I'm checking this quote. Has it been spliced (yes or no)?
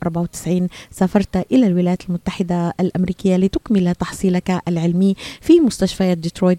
no